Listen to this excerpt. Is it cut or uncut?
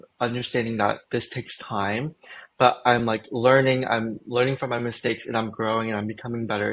uncut